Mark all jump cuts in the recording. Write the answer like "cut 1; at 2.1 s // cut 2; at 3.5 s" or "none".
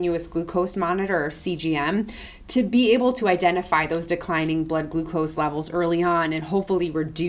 none